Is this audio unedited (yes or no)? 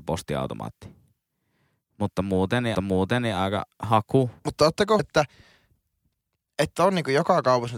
no